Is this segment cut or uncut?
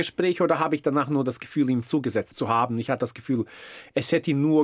cut